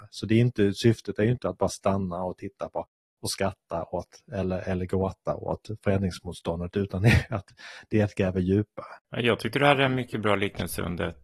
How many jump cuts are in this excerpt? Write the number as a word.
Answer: one